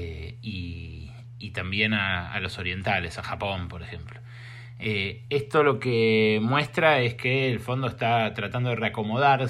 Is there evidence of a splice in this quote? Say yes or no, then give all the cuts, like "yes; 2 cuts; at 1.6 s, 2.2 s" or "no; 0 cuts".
no; 0 cuts